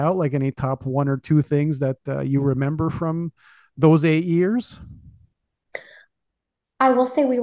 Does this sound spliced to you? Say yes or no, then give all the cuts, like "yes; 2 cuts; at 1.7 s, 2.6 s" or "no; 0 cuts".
no; 0 cuts